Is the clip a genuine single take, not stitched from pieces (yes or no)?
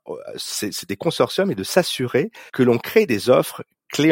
no